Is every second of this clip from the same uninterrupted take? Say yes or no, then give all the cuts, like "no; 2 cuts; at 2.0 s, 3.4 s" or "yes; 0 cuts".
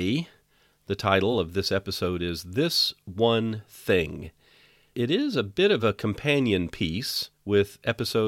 yes; 0 cuts